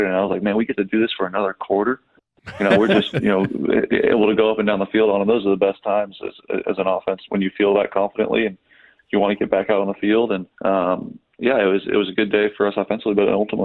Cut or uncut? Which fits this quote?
cut